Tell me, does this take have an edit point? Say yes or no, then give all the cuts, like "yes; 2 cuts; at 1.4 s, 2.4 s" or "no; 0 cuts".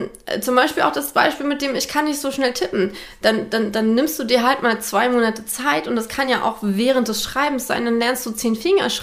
no; 0 cuts